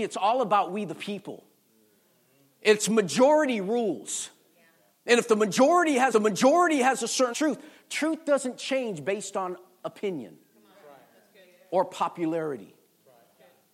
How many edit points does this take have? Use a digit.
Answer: 2